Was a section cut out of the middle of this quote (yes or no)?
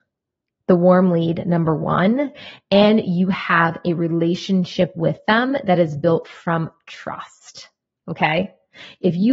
no